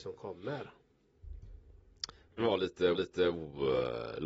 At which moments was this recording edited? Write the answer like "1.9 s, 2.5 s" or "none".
2.4 s, 2.9 s